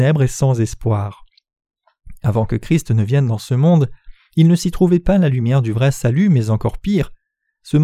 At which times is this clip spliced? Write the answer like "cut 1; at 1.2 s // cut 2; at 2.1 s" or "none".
none